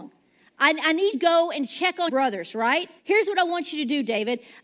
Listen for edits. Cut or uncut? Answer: cut